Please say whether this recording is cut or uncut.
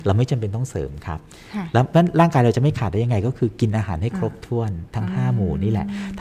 uncut